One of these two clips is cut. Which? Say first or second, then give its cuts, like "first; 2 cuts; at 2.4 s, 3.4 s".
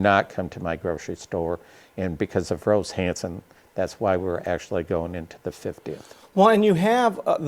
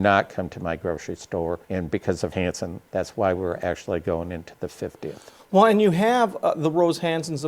second; 3 cuts; at 1.6 s, 2.3 s, 2.9 s